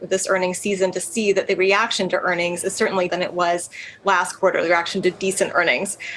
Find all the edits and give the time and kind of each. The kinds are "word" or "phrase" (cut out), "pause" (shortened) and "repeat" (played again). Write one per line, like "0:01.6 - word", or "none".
0:03.1 - word